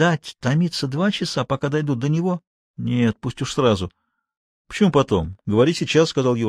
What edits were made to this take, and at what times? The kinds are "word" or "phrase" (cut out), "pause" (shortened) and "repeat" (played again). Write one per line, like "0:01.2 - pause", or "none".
none